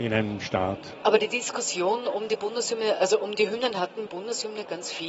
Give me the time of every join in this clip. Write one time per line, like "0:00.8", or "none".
0:04.1